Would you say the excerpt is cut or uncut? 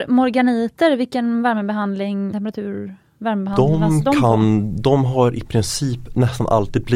cut